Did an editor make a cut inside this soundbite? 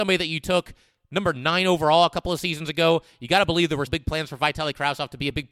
yes; 1 cut; at 3.9 s

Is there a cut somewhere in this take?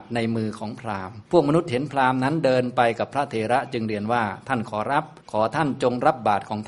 yes; 2 cuts; at 1.3 s, 5.2 s

